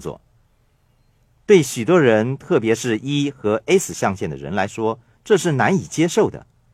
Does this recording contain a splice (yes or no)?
no